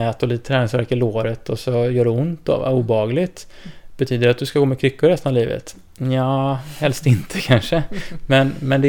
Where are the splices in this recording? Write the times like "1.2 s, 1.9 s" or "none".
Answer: none